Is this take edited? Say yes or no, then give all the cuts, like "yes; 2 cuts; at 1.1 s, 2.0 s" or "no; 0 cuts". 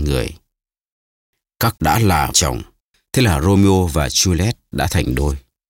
yes; 3 cuts; at 1.8 s, 2.3 s, 2.8 s